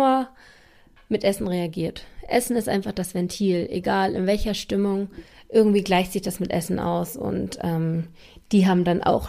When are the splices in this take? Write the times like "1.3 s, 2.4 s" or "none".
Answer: none